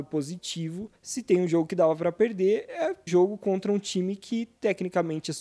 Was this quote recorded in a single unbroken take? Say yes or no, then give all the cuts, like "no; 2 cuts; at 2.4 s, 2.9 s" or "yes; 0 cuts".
no; 2 cuts; at 1.0 s, 3.1 s